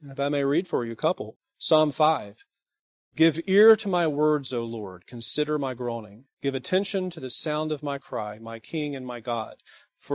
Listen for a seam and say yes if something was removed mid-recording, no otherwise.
no